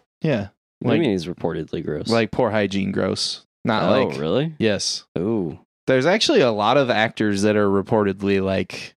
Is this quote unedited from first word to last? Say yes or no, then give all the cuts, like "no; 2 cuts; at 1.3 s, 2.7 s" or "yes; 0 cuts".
yes; 0 cuts